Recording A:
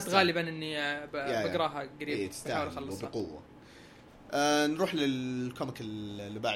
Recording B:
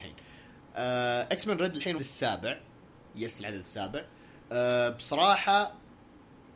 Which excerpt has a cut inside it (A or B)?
B